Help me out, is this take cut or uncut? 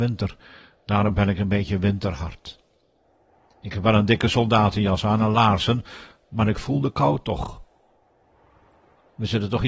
uncut